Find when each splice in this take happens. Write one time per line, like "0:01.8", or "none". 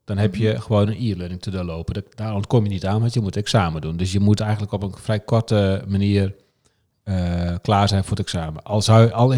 none